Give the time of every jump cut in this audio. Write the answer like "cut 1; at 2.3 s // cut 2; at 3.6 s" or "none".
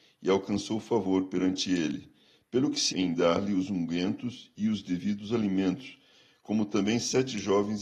cut 1; at 2.9 s